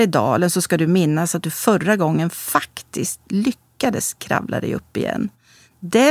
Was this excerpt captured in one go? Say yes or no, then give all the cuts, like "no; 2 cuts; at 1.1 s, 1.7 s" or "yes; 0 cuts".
yes; 0 cuts